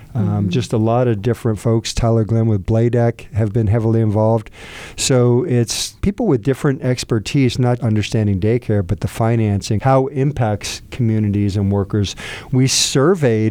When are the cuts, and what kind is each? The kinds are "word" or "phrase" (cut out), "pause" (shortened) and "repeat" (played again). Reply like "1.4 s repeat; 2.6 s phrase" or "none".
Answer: 6.0 s pause; 7.8 s word; 9.8 s phrase